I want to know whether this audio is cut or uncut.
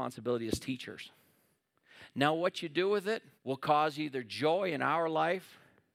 cut